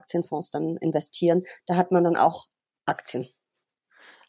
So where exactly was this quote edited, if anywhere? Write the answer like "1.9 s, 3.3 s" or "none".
none

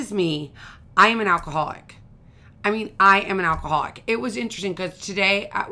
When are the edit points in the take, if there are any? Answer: none

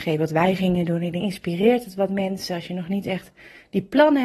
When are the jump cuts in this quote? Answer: 1.2 s

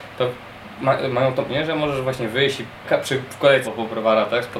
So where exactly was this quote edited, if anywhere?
1.5 s, 2.8 s, 3.6 s

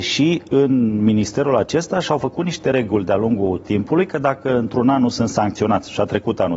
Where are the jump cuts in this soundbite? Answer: none

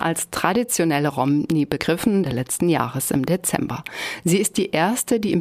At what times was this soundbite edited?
2.2 s

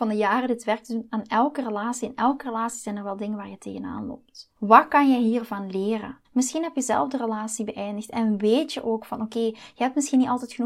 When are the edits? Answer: 4.6 s, 6.2 s

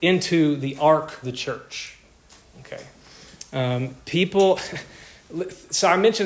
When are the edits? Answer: 1.2 s

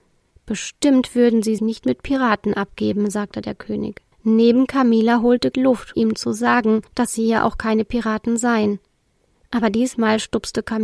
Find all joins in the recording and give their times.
1.6 s, 4.1 s, 5.5 s, 5.9 s, 6.9 s

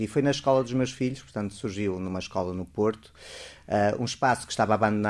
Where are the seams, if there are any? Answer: none

